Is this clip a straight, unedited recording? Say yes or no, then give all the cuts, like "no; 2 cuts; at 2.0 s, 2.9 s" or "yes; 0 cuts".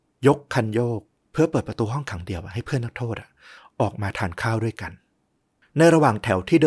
yes; 0 cuts